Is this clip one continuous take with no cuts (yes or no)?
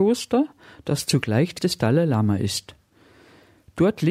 no